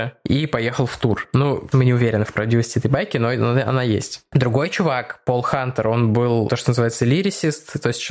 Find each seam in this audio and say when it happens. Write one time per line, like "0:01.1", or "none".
0:01.7
0:06.5